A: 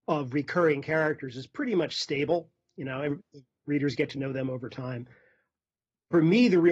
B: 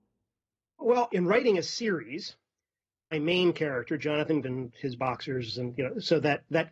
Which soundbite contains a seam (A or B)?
B